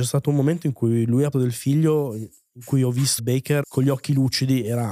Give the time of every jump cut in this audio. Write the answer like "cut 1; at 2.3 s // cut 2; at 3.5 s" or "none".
cut 1; at 1.3 s // cut 2; at 3.2 s // cut 3; at 3.6 s